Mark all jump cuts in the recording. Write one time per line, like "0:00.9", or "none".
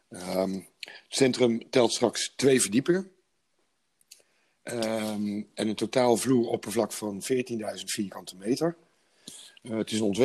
none